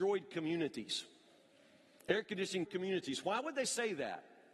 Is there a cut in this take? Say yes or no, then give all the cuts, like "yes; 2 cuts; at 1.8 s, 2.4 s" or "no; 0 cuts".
yes; 1 cut; at 2.6 s